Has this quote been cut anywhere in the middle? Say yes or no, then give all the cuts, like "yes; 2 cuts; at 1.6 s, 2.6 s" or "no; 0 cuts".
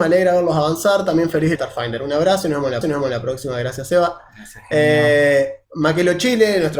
yes; 3 cuts; at 1.5 s, 2.8 s, 5.6 s